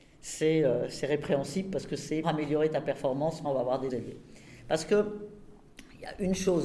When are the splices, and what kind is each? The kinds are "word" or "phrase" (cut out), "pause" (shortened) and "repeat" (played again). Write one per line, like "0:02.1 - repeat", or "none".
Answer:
0:02.2 - word
0:03.4 - phrase
0:03.9 - word